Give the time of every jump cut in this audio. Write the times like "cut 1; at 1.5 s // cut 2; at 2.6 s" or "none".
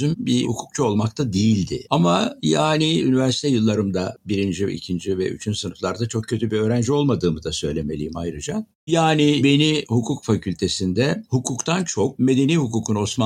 cut 1; at 4.2 s